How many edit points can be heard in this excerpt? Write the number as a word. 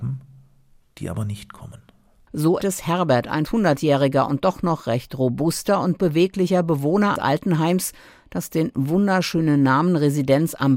three